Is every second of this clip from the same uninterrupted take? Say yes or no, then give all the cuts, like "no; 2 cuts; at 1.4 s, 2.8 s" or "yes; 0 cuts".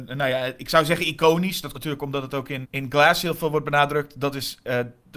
no; 2 cuts; at 1.7 s, 2.6 s